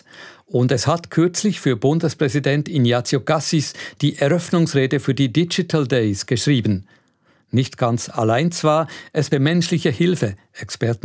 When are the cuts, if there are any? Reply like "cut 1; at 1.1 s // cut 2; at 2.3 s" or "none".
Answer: cut 1; at 9.3 s